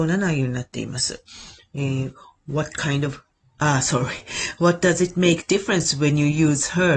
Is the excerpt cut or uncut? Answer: uncut